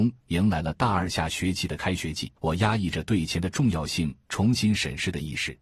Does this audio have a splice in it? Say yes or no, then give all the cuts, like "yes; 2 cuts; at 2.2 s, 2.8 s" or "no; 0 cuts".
yes; 1 cut; at 2.4 s